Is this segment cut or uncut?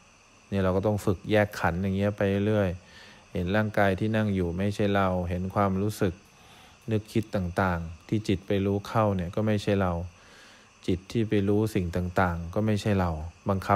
uncut